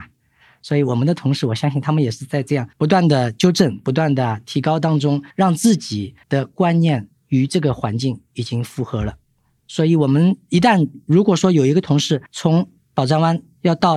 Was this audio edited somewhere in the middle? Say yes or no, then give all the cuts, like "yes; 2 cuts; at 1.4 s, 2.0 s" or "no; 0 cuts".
yes; 4 cuts; at 2.7 s, 5.3 s, 6.2 s, 12.3 s